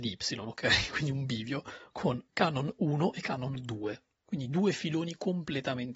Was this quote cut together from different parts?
yes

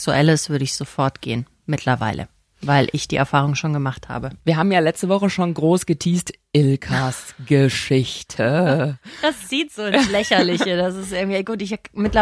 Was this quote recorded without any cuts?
yes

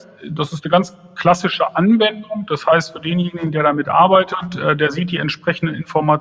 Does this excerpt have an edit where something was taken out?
no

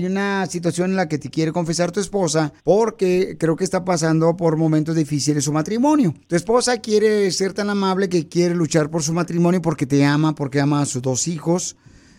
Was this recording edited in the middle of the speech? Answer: yes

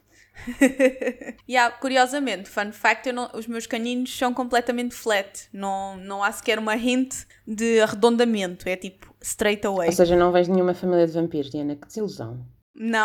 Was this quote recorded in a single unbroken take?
no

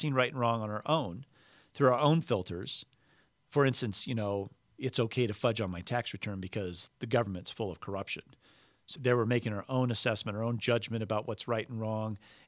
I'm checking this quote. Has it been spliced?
yes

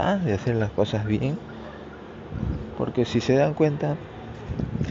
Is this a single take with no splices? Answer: yes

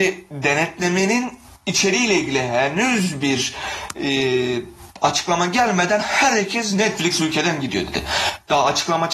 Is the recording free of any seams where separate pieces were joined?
yes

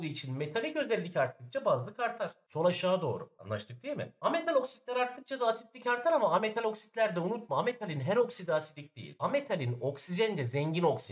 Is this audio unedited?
yes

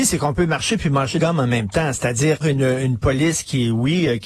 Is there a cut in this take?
yes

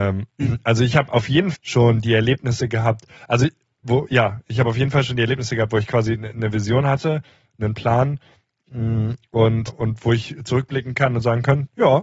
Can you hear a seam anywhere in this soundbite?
yes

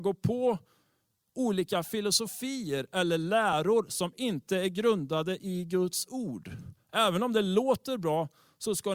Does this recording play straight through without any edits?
yes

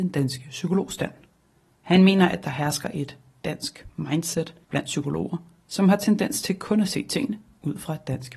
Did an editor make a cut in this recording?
no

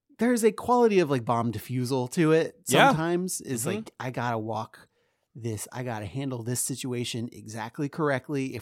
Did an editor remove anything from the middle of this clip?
no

